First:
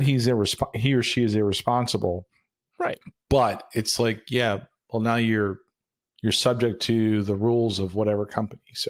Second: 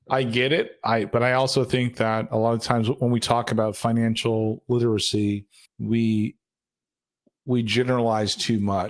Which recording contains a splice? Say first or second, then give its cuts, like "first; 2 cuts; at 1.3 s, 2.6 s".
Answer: second; 1 cut; at 5.7 s